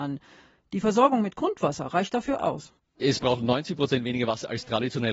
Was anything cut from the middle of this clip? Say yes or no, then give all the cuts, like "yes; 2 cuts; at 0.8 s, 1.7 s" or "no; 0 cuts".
no; 0 cuts